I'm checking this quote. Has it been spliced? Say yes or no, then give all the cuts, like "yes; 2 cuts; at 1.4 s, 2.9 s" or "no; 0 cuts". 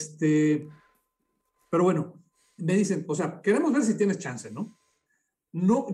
no; 0 cuts